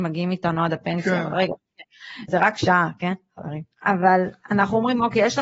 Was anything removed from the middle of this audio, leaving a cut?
yes; 2 cuts; at 2.3 s, 3.7 s

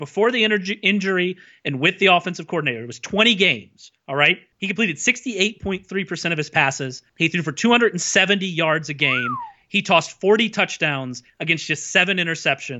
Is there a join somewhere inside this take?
no; 0 cuts

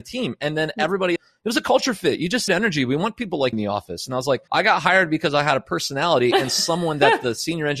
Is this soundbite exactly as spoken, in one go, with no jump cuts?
no; 4 cuts; at 1.2 s, 2.5 s, 3.5 s, 4.5 s

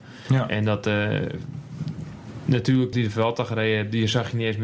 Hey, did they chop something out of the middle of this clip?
yes; 1 cut; at 2.9 s

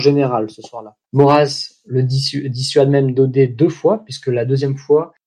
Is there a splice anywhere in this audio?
yes; 1 cut; at 1.0 s

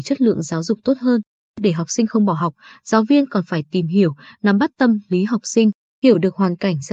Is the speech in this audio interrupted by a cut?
no; 0 cuts

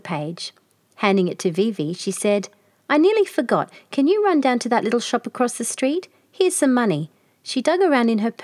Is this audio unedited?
yes; 0 cuts

